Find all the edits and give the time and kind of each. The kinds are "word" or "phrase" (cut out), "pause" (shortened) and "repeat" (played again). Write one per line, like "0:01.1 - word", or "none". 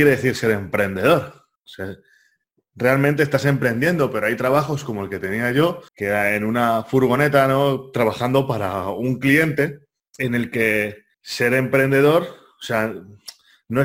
0:01.6 - pause
0:05.9 - pause
0:10.0 - pause
0:11.1 - pause